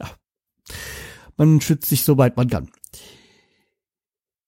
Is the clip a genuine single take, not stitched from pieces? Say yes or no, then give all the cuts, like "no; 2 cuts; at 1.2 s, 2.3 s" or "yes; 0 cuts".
yes; 0 cuts